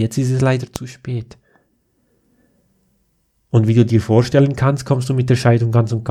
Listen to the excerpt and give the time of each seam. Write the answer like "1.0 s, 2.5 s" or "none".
none